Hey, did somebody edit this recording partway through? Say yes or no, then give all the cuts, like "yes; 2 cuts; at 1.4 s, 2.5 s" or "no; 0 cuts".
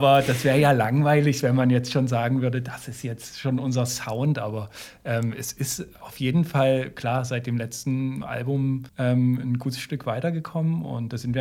yes; 1 cut; at 8.9 s